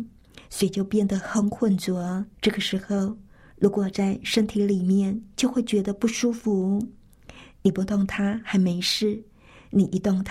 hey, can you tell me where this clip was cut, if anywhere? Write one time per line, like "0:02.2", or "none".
0:02.3